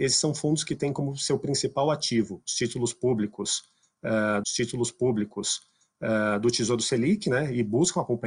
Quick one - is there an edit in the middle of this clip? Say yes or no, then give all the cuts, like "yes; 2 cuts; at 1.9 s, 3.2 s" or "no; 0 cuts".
yes; 1 cut; at 4.4 s